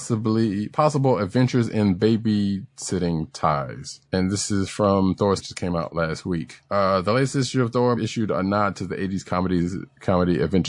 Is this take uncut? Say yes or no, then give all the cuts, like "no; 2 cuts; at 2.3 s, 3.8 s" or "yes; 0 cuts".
no; 4 cuts; at 4.0 s, 5.4 s, 6.7 s, 8.0 s